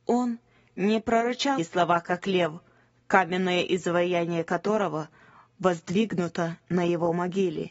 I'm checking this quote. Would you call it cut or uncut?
cut